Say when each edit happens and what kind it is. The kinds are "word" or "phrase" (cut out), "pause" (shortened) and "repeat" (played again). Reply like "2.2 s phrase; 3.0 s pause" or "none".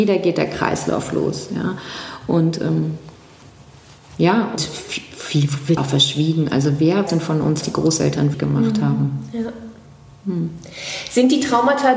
4.6 s word; 5.8 s word; 7.1 s word; 7.6 s word; 8.3 s word